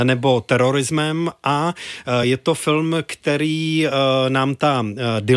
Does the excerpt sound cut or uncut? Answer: uncut